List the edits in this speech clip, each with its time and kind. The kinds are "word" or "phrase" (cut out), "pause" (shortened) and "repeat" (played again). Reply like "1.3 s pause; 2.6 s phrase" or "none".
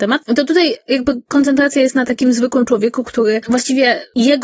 none